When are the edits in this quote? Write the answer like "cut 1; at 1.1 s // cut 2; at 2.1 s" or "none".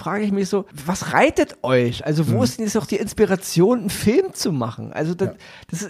none